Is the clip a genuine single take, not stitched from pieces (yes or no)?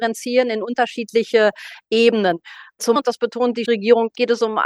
no